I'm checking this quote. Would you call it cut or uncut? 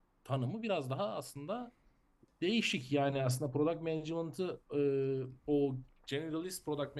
cut